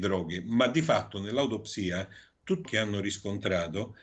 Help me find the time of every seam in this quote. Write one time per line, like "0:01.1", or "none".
0:02.6